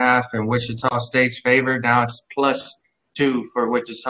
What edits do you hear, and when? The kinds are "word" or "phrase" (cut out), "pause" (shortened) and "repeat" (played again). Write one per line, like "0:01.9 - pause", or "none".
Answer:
none